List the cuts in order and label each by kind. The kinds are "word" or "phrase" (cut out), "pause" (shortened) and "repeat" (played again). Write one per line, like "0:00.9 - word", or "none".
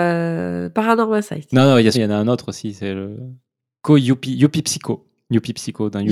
0:01.9 - word